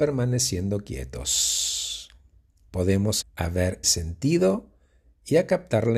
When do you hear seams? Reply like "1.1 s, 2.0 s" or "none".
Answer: 3.2 s, 3.8 s